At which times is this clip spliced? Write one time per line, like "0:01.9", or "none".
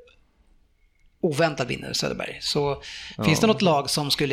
none